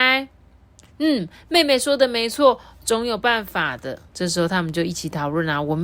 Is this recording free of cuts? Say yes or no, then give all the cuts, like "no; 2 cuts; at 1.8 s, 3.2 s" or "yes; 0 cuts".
no; 1 cut; at 4.1 s